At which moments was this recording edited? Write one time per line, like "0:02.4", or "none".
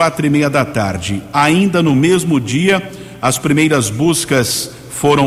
none